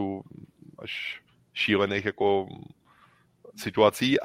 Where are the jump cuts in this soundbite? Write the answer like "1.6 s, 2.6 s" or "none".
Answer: none